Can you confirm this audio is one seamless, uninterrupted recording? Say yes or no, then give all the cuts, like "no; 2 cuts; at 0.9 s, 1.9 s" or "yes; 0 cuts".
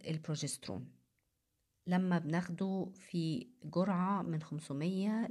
yes; 0 cuts